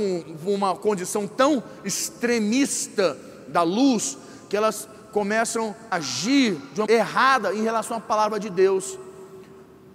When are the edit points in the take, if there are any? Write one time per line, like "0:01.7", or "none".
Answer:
0:05.9
0:06.9